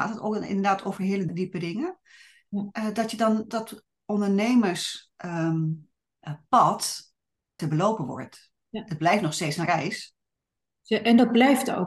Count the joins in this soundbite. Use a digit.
4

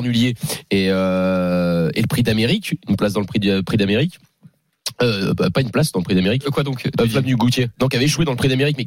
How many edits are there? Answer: 0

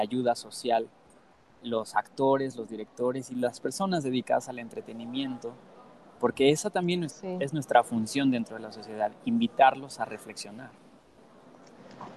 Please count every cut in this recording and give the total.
0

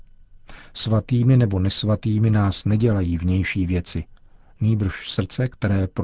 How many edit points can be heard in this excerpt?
0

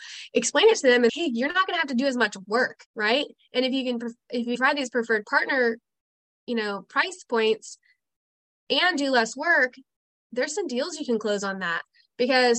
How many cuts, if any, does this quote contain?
3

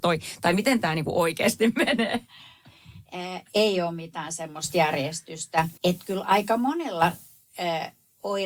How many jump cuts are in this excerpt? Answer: 1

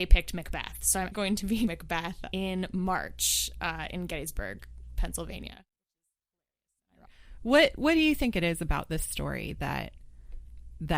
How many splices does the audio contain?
3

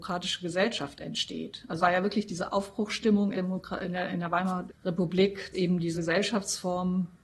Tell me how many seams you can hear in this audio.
5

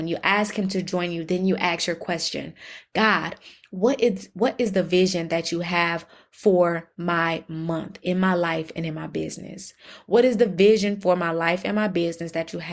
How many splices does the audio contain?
0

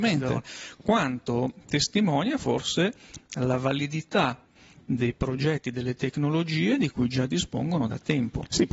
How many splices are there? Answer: 0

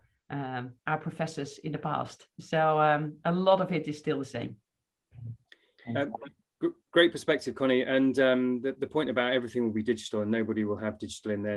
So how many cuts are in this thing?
0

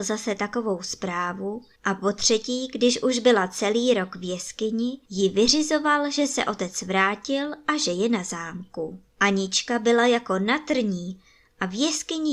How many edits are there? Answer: 3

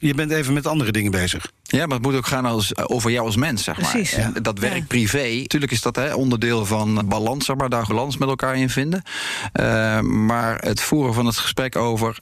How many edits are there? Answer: 4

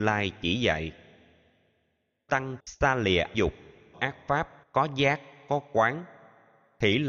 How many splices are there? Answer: 5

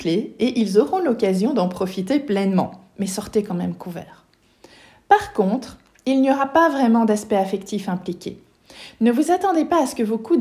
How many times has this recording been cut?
0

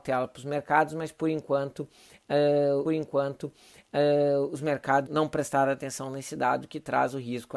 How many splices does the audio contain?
2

